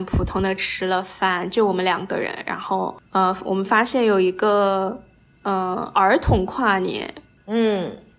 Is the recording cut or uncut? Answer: uncut